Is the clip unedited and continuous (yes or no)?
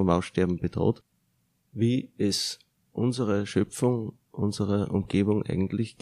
yes